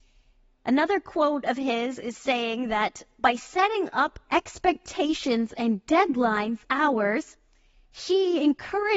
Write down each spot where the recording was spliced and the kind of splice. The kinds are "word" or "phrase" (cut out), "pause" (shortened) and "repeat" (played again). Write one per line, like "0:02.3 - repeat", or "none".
0:06.6 - phrase